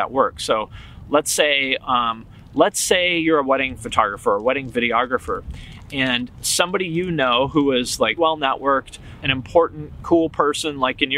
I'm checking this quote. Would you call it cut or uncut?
cut